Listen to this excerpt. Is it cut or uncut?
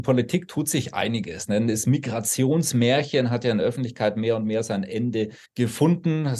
cut